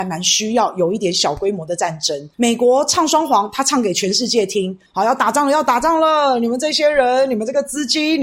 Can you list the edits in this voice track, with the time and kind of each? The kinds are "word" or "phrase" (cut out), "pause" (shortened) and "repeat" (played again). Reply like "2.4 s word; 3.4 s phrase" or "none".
2.3 s pause